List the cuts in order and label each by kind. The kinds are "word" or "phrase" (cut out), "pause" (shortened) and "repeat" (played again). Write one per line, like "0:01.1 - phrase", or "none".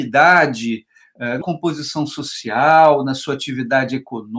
0:01.4 - word